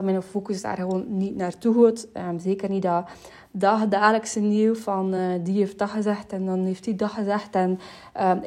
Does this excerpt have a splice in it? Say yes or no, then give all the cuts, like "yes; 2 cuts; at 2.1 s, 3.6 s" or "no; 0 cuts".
no; 0 cuts